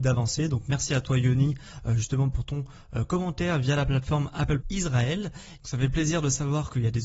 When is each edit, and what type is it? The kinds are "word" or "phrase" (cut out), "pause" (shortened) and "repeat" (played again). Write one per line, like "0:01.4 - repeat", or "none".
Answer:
0:04.6 - word

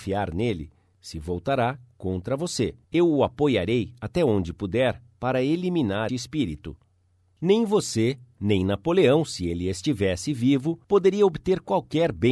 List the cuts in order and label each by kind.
0:02.8 - pause
0:06.1 - word
0:10.8 - pause

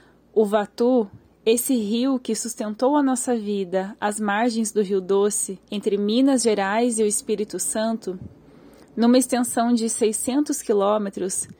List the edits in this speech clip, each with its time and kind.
0:05.6 - pause

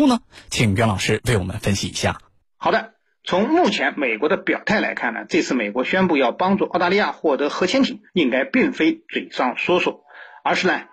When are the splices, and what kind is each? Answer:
0:08.1 - pause

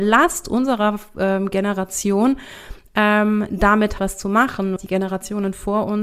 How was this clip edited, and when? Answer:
0:04.0 - word
0:04.8 - word

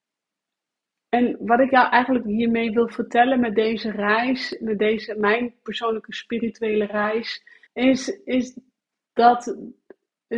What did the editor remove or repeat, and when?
0:07.7 - pause

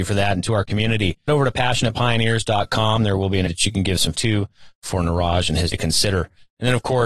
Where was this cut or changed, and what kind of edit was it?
0:01.3 - word
0:03.5 - word
0:04.1 - word
0:05.7 - word

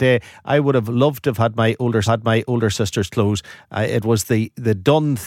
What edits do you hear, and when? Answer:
0:02.0 - repeat

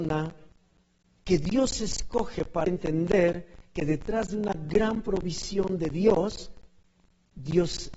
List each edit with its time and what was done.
0:02.7 - word

